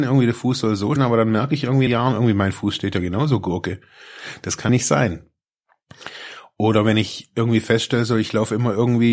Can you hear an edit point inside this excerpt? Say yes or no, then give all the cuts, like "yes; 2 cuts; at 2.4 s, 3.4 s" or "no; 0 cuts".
yes; 3 cuts; at 1.0 s, 1.9 s, 4.7 s